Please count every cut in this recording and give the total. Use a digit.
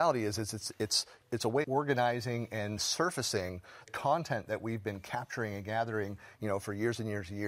3